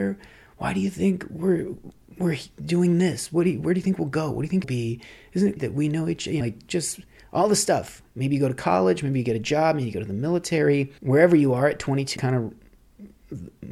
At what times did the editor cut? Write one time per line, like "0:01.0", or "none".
0:02.0
0:04.6
0:05.6
0:06.4
0:11.0
0:12.2